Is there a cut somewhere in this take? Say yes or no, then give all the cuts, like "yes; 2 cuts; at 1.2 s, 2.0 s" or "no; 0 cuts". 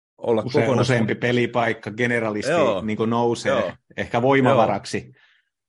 no; 0 cuts